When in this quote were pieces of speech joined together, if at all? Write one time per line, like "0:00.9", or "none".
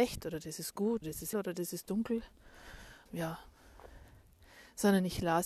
0:01.0
0:01.3
0:03.1